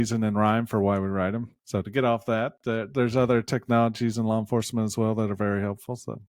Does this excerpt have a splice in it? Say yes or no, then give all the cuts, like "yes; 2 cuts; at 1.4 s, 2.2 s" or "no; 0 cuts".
yes; 1 cut; at 1.6 s